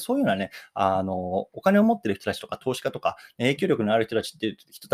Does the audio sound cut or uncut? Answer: uncut